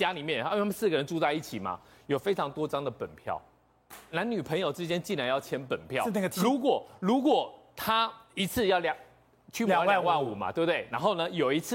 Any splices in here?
no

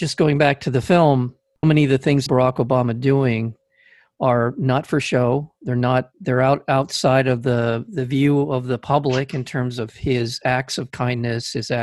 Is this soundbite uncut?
no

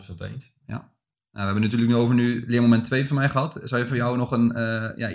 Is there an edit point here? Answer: no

